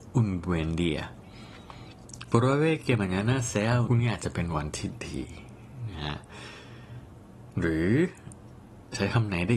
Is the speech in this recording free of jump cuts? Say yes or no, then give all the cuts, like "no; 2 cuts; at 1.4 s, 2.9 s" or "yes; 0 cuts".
no; 2 cuts; at 2.3 s, 3.9 s